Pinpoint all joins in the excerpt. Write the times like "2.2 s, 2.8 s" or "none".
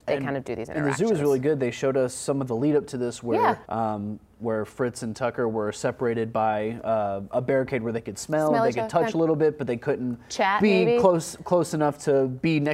3.6 s

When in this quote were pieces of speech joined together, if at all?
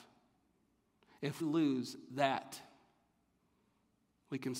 1.4 s

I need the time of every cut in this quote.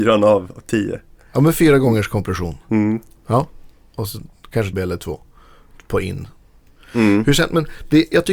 4.7 s

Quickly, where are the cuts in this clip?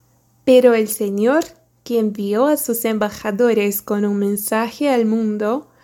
none

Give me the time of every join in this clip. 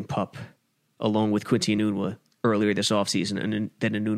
none

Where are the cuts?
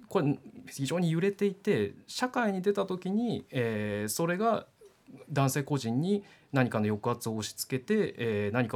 none

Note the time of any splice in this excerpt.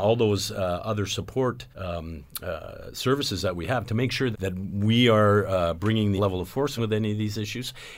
1.7 s, 4.3 s, 6.2 s, 6.8 s

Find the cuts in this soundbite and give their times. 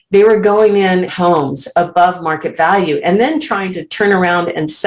1.1 s

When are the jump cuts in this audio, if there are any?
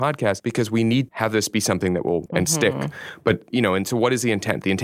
1.1 s, 2.3 s, 3.5 s

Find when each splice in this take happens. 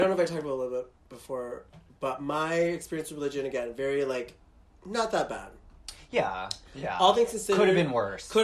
none

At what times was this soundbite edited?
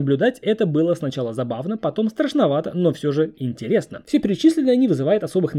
none

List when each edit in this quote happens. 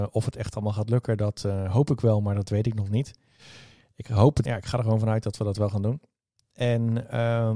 4.4 s

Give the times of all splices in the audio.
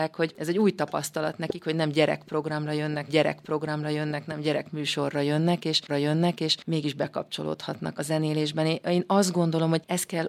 3.1 s, 5.9 s, 8.0 s

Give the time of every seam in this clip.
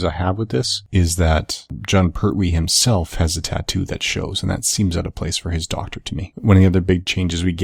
none

